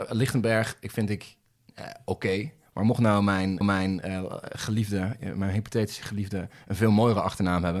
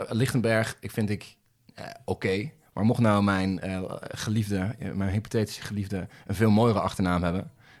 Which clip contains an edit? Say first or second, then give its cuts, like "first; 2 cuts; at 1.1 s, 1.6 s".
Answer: first; 1 cut; at 3.6 s